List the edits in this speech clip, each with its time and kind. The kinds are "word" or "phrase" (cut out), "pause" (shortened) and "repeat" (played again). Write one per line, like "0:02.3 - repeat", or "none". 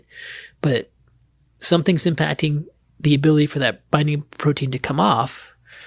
none